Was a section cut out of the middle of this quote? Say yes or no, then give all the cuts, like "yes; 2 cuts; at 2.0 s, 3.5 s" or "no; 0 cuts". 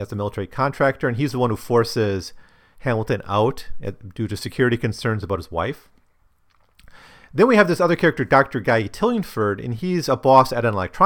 no; 0 cuts